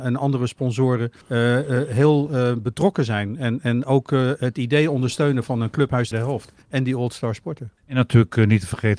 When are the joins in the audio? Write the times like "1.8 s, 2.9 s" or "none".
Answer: 1.2 s, 6.1 s, 6.6 s, 7.8 s